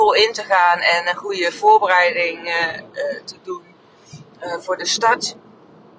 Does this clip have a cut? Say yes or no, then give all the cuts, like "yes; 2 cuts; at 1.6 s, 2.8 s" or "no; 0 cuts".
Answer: no; 0 cuts